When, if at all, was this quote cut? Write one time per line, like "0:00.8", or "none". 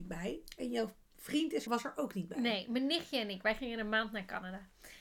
0:01.7